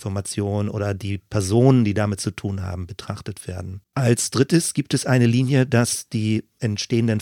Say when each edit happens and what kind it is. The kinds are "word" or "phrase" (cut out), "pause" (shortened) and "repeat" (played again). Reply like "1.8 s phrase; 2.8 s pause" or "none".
3.9 s pause

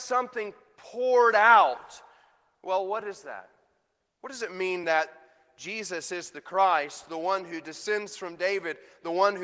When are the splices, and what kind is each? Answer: none

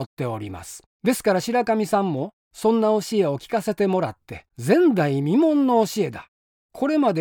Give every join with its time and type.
0.9 s pause; 4.5 s pause

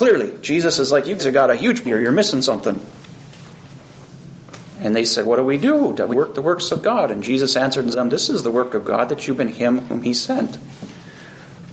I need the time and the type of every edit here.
1.2 s word; 1.8 s word; 5.2 s word; 6.1 s word; 7.9 s word; 9.4 s word

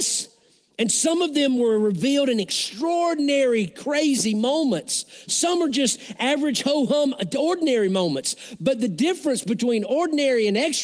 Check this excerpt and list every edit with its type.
none

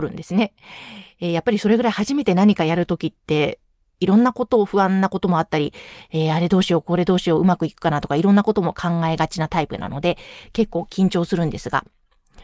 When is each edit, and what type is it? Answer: none

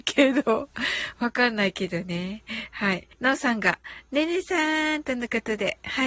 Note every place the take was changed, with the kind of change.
3.1 s pause

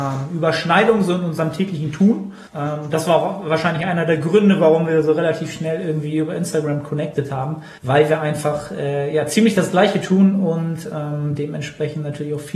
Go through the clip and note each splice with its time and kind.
2.5 s pause; 7.8 s pause

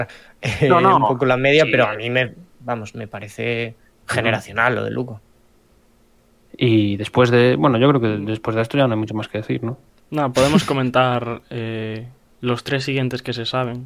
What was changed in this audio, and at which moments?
none

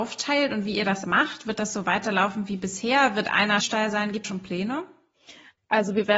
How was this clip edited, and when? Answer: 1.0 s word; 3.6 s phrase; 4.2 s phrase

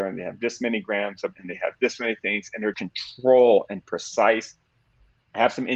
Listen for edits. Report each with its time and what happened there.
1.3 s word; 2.7 s word

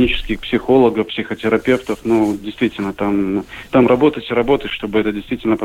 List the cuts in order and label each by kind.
none

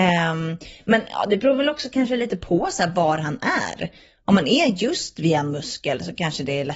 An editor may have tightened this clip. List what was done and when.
none

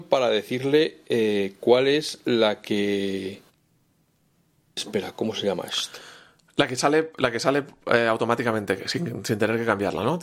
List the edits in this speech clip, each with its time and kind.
none

